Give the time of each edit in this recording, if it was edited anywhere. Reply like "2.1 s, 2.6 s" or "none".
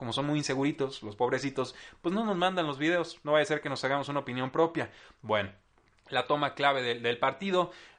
none